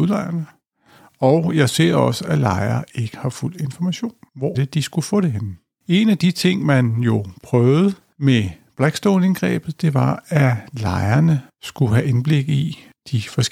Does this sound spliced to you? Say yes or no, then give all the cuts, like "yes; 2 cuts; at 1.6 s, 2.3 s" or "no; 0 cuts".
yes; 1 cut; at 4.5 s